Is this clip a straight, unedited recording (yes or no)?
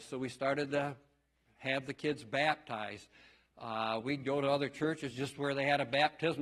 yes